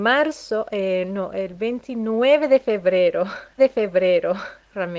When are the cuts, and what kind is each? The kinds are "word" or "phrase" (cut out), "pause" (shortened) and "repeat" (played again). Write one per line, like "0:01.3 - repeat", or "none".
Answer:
0:03.6 - repeat